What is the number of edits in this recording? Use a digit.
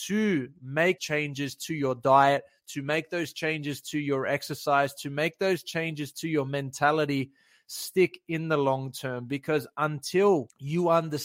1